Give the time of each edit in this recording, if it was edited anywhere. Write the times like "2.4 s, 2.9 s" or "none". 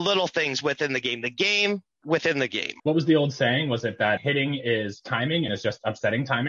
2.8 s, 4.2 s, 5.5 s